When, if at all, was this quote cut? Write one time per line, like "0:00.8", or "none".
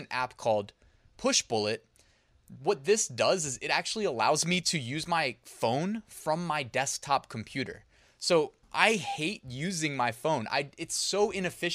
0:08.6